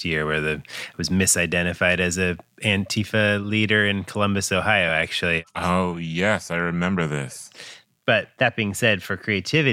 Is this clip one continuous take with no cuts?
yes; 0 cuts

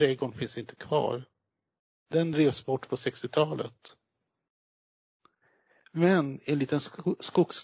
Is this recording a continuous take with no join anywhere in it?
yes; 0 cuts

